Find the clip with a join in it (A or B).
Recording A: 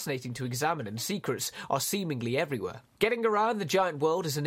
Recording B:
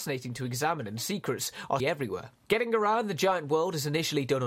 B